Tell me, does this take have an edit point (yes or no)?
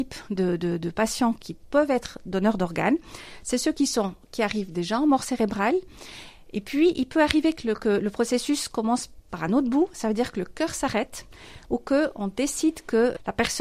no